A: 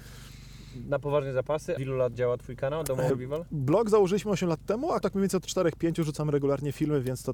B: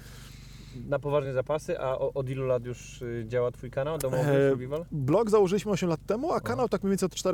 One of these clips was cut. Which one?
A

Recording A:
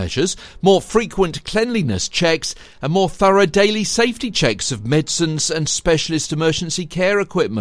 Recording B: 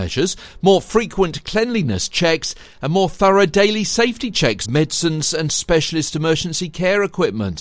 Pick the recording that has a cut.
B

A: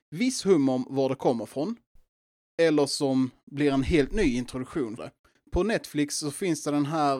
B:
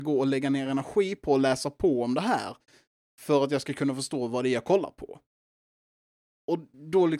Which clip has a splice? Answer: A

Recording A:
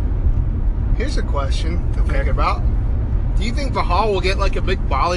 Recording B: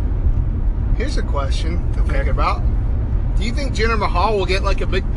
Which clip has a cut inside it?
A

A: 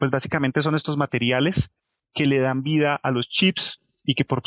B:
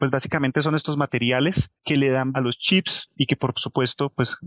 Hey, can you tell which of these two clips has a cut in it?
B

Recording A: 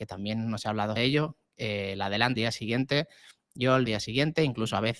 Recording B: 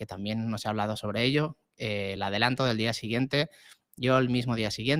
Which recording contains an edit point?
A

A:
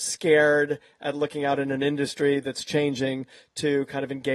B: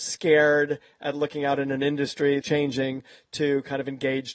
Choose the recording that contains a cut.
B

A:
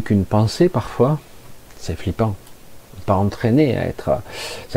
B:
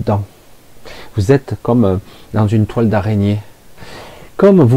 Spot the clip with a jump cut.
A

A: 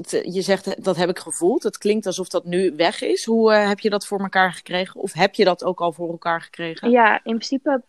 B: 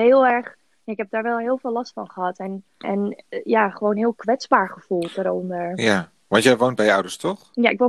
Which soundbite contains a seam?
B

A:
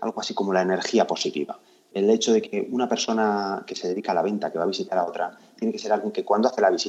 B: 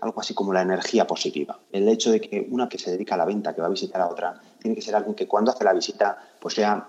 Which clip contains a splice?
B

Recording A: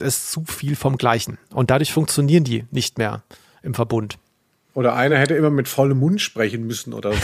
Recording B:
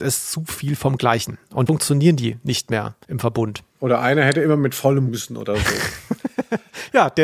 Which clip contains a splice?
B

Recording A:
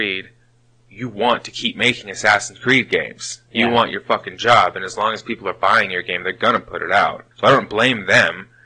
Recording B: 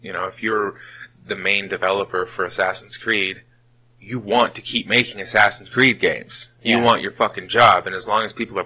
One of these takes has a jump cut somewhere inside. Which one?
A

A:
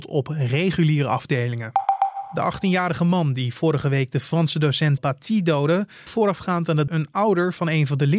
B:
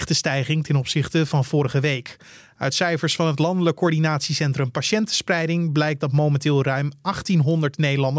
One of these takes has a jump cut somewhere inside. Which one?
A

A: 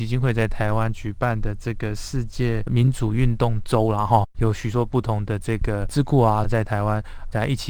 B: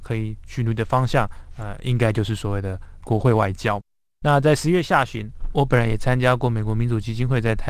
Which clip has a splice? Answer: A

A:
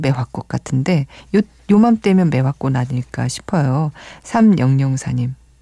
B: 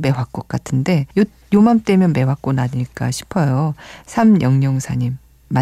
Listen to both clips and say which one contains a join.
B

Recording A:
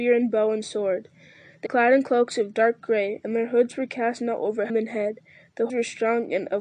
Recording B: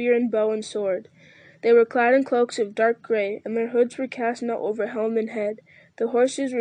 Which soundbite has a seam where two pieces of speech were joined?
A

